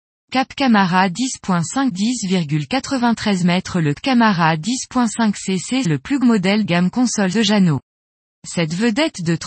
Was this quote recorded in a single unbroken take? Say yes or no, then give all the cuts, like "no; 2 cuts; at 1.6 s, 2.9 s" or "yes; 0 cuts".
no; 6 cuts; at 1.9 s, 3.9 s, 5.8 s, 6.2 s, 6.6 s, 7.3 s